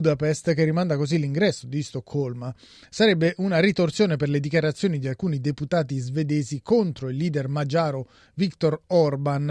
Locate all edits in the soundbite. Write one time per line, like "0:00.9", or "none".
none